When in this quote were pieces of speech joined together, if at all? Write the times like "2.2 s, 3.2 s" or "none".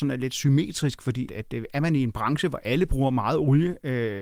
1.3 s